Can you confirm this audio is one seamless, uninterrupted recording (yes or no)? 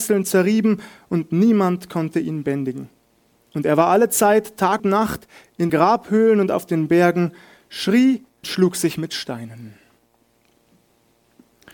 no